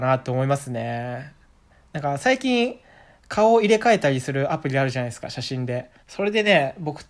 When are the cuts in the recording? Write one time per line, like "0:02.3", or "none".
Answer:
0:06.0